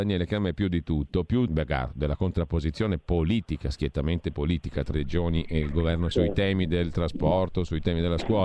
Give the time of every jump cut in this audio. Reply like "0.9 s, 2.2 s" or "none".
1.5 s, 4.9 s, 6.1 s